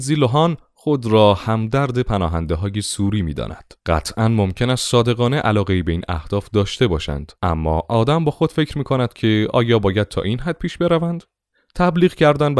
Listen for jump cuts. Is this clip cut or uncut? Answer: cut